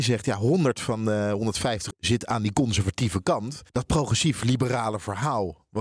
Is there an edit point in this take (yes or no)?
yes